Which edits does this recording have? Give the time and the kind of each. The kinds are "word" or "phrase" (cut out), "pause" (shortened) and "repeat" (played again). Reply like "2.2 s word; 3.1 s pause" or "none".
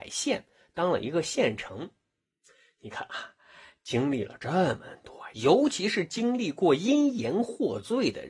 none